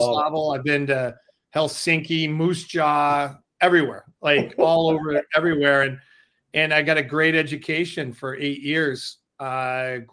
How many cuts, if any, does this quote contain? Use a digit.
0